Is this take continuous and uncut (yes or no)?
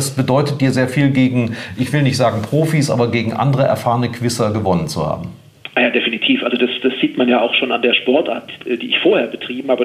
yes